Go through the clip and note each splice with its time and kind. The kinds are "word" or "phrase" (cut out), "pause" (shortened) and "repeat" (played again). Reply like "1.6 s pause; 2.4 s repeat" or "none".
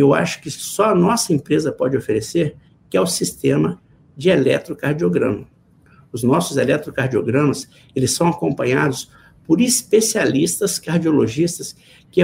none